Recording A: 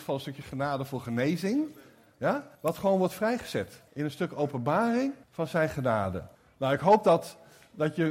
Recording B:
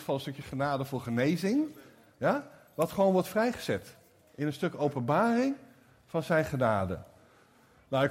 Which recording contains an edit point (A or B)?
A